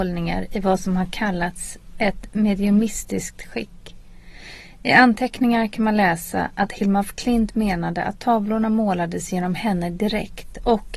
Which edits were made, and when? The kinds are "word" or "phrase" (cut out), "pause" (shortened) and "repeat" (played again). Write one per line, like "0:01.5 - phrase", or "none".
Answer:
none